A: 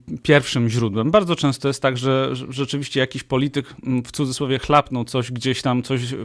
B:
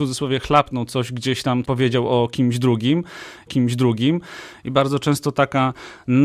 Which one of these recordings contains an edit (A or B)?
B